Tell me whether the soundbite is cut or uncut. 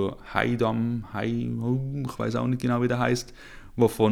uncut